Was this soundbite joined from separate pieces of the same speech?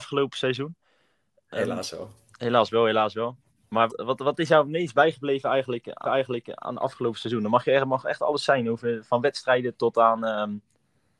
yes; 2 cuts; at 3.9 s, 6.0 s

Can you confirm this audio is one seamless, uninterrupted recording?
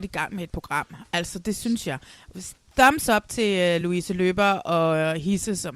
yes; 0 cuts

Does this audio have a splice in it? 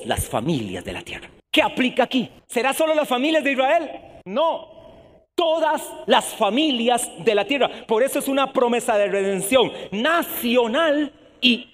yes; 3 cuts; at 1.4 s, 2.4 s, 4.2 s

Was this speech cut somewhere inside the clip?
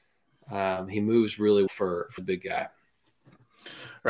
yes; 2 cuts; at 1.7 s, 2.2 s

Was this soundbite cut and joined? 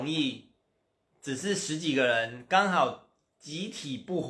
no; 0 cuts

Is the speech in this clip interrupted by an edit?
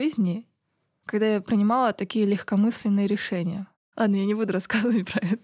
no; 0 cuts

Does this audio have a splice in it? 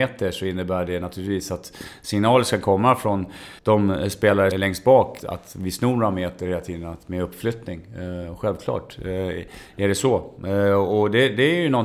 yes; 3 cuts; at 3.6 s, 4.5 s, 5.2 s

